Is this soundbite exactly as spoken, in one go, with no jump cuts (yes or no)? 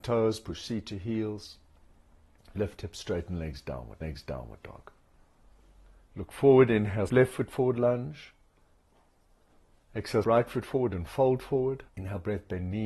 no